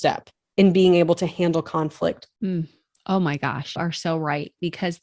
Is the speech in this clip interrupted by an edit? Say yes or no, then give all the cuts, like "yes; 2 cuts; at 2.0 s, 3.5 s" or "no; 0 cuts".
yes; 2 cuts; at 2.4 s, 3.8 s